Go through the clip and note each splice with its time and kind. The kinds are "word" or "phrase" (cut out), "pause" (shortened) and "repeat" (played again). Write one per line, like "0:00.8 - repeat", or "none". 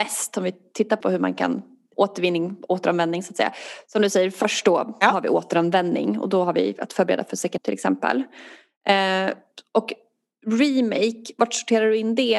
0:01.0 - word
0:01.9 - word
0:07.6 - word